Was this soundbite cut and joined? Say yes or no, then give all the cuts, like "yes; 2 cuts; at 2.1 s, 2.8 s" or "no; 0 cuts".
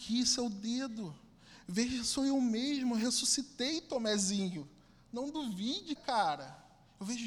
yes; 1 cut; at 6.0 s